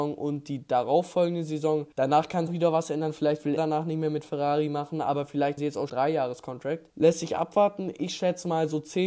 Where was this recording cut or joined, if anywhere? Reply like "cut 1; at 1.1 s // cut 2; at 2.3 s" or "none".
cut 1; at 1.9 s // cut 2; at 2.5 s // cut 3; at 3.6 s // cut 4; at 5.6 s // cut 5; at 5.9 s // cut 6; at 6.9 s

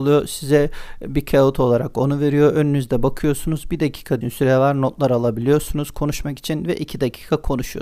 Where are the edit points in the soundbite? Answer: cut 1; at 4.2 s

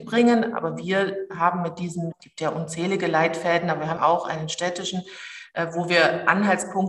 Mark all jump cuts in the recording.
cut 1; at 2.1 s // cut 2; at 4.0 s

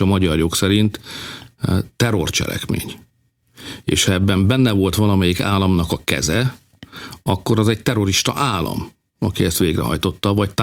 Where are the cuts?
none

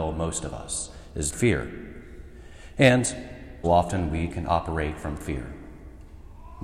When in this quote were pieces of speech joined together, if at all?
cut 1; at 1.3 s // cut 2; at 3.6 s // cut 3; at 4.3 s

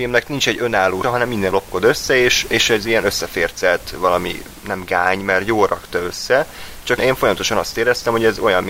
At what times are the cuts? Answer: cut 1; at 1.0 s // cut 2; at 1.5 s // cut 3; at 2.5 s // cut 4; at 7.0 s

